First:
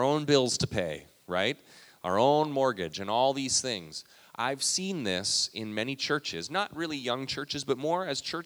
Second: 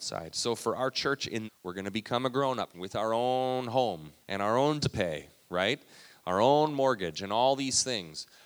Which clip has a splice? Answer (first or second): second